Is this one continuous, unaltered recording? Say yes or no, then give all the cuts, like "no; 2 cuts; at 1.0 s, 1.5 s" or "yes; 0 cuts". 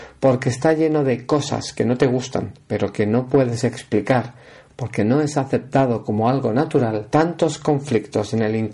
no; 1 cut; at 7.1 s